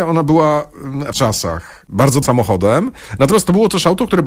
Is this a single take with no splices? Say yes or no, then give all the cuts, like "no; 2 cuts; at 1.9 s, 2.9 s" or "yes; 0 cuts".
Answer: no; 2 cuts; at 1.1 s, 2.2 s